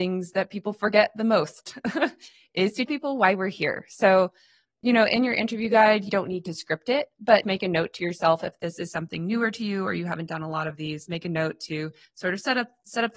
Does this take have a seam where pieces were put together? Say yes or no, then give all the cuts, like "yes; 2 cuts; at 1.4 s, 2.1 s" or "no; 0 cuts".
yes; 3 cuts; at 2.9 s, 6.1 s, 7.4 s